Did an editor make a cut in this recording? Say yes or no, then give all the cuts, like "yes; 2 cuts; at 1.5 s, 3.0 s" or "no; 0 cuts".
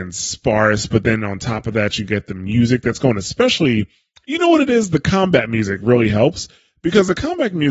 no; 0 cuts